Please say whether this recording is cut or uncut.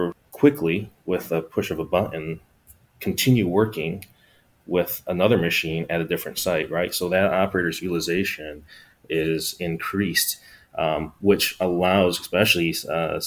uncut